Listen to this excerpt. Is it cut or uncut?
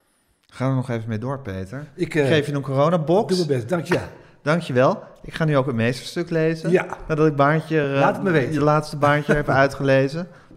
uncut